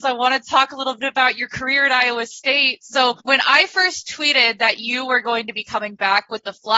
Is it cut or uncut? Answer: cut